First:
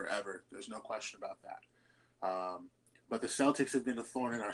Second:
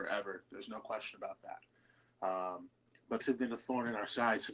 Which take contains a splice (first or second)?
second